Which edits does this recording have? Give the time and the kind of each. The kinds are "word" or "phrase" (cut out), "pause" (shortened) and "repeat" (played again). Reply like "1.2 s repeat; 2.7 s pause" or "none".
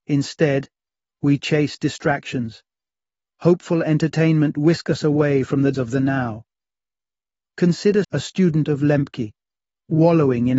4.5 s word; 5.7 s word; 8.0 s word